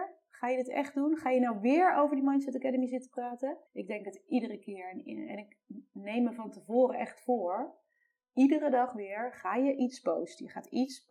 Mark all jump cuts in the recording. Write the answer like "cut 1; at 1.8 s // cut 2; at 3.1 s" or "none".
cut 1; at 3.7 s